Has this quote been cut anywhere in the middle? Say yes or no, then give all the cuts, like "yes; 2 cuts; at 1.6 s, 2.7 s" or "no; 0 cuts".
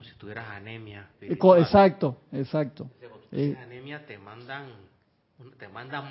yes; 1 cut; at 1.1 s